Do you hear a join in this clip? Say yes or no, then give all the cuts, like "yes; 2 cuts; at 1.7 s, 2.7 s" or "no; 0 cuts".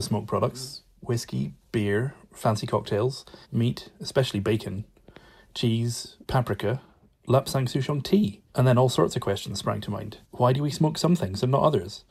yes; 4 cuts; at 3.4 s, 6.2 s, 8.5 s, 10.2 s